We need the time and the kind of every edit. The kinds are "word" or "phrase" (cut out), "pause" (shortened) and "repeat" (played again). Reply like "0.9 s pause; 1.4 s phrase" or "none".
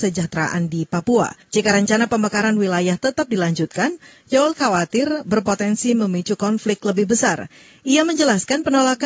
1.4 s pause